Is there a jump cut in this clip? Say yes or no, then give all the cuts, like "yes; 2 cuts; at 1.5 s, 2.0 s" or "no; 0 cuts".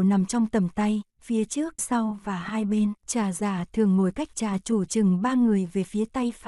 yes; 4 cuts; at 1.1 s, 1.8 s, 3.0 s, 4.3 s